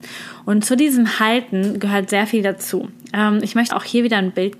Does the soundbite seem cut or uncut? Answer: cut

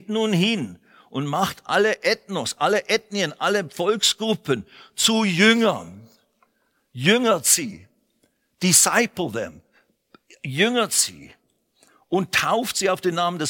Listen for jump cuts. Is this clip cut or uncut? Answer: uncut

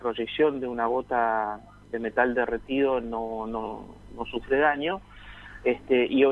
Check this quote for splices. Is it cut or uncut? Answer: uncut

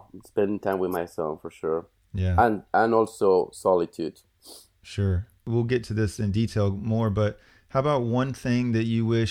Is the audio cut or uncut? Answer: uncut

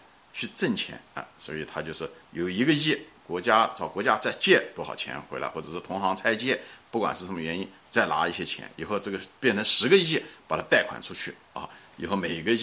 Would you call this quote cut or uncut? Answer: cut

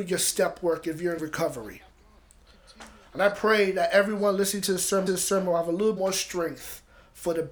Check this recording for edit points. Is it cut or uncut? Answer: cut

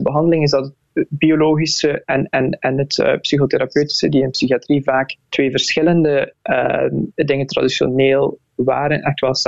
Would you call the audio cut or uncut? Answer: cut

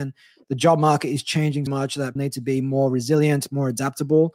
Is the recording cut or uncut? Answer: cut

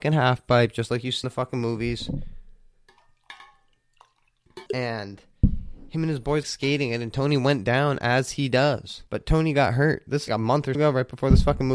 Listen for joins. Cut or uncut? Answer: cut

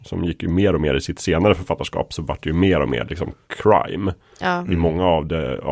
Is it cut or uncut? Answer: uncut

